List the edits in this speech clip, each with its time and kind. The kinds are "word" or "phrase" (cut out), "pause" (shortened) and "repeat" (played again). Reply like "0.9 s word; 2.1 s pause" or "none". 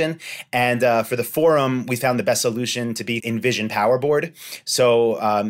3.2 s word